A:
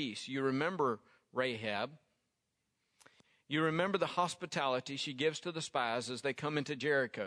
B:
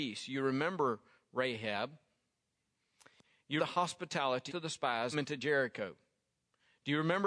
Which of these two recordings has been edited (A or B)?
B